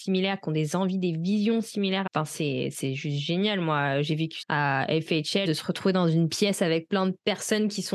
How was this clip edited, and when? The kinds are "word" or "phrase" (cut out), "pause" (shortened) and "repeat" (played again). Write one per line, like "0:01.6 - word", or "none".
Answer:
0:02.1 - phrase
0:04.4 - phrase
0:05.5 - word